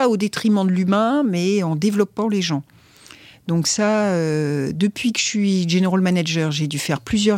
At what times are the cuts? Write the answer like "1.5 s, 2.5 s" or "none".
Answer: none